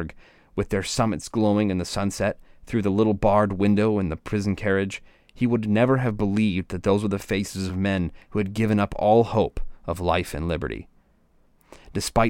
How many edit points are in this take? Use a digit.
0